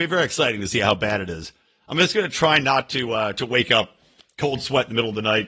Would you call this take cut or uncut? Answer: uncut